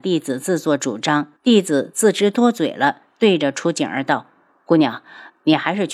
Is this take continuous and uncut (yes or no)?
no